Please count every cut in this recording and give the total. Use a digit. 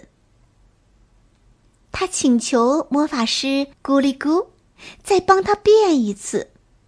1